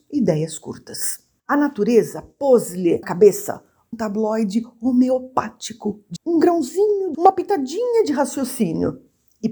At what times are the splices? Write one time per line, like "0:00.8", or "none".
0:03.0
0:03.9
0:06.2
0:07.1